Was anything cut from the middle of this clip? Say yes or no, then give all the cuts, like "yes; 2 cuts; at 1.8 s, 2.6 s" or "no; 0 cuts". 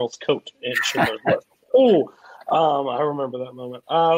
no; 0 cuts